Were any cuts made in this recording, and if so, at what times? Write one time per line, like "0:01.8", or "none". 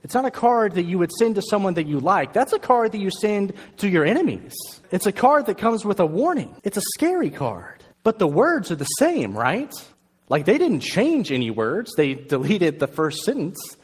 0:04.8
0:06.6
0:07.9
0:09.9